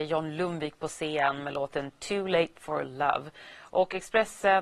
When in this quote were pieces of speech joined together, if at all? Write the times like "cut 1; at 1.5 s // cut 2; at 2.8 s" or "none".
none